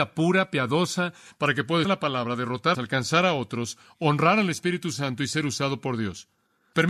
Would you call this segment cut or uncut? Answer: cut